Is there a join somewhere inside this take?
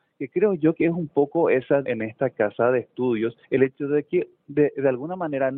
yes; 2 cuts; at 1.8 s, 3.4 s

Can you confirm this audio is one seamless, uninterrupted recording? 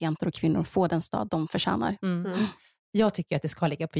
yes; 0 cuts

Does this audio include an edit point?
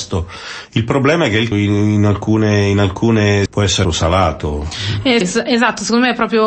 yes; 4 cuts; at 1.5 s, 3.5 s, 3.8 s, 5.2 s

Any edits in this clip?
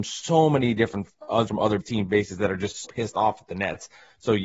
yes; 3 cuts; at 1.5 s, 1.8 s, 2.8 s

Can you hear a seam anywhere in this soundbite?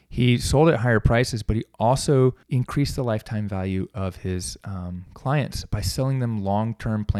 yes; 1 cut; at 2.4 s

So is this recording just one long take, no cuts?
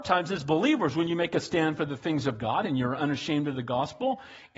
yes; 0 cuts

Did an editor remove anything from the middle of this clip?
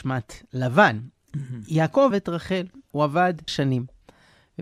yes; 3 cuts; at 2.1 s, 2.9 s, 3.5 s

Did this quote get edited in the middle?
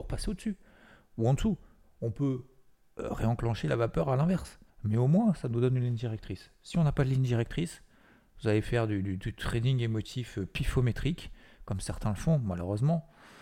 yes; 1 cut; at 4.7 s

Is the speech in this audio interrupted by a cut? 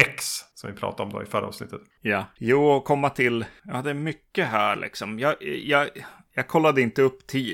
no; 0 cuts

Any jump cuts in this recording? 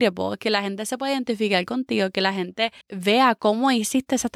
yes; 1 cut; at 2.8 s

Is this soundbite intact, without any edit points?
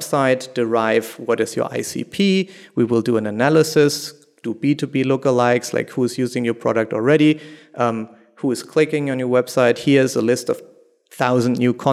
yes; 0 cuts

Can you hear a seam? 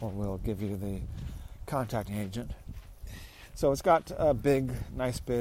yes; 1 cut; at 2.1 s

